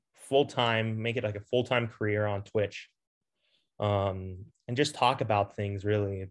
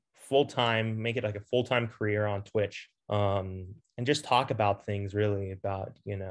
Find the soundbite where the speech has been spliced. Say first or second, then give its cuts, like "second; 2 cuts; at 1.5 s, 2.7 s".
second; 1 cut; at 3.0 s